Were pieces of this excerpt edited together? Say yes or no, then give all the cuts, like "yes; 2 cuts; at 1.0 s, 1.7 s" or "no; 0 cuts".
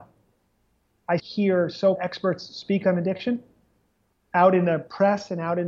yes; 2 cuts; at 1.2 s, 2.0 s